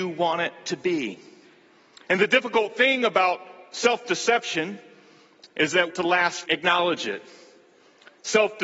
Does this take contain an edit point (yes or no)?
yes